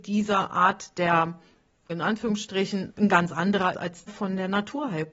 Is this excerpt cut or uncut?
cut